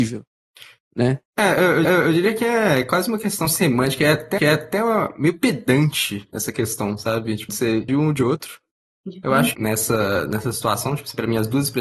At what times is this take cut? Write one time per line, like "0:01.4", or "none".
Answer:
0:01.8
0:04.4
0:07.5
0:07.9
0:09.5